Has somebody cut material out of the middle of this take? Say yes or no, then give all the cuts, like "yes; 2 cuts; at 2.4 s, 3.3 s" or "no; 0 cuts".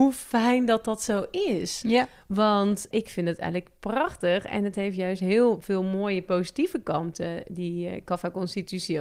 yes; 1 cut; at 2.9 s